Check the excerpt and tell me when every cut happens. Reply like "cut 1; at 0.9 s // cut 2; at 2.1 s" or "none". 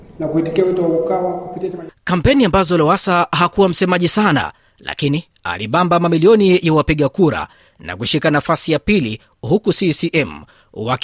none